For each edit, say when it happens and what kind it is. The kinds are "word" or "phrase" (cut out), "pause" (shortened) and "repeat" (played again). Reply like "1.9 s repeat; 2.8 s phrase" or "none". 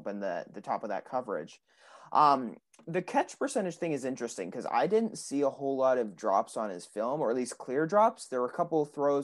none